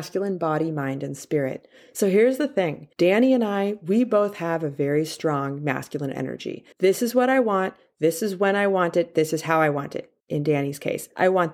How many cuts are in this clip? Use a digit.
3